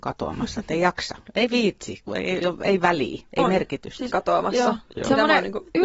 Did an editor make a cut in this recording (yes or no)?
yes